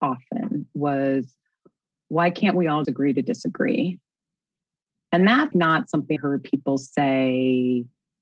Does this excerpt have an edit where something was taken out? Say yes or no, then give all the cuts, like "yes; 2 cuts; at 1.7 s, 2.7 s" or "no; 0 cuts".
yes; 3 cuts; at 2.8 s, 5.5 s, 6.2 s